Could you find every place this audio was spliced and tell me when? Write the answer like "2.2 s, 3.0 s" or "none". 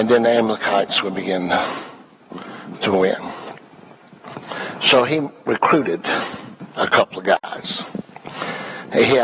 none

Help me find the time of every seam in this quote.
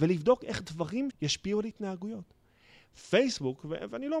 1.1 s

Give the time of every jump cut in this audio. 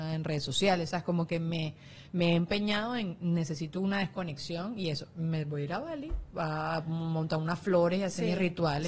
none

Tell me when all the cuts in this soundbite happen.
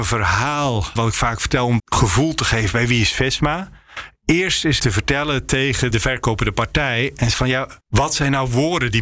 1.0 s, 1.8 s, 4.8 s, 5.9 s, 7.3 s, 7.8 s

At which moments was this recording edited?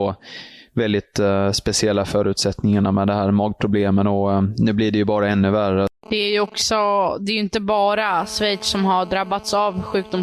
6.0 s

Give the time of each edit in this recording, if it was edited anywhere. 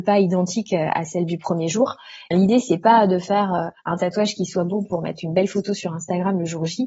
2.3 s, 3.8 s

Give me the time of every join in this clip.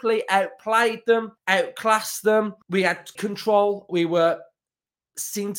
1.4 s, 2.6 s, 3.2 s, 3.9 s

